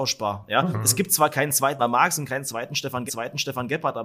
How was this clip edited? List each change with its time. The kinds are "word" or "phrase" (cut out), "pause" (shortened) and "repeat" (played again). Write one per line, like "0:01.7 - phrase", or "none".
0:01.8 - word
0:03.1 - repeat